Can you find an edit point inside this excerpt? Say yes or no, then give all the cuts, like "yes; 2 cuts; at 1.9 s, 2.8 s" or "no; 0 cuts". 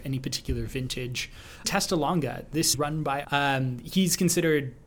yes; 3 cuts; at 1.6 s, 2.7 s, 3.2 s